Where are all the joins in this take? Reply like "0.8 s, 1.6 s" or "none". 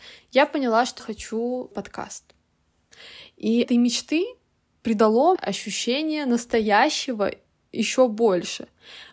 1.0 s, 1.7 s, 3.6 s, 5.3 s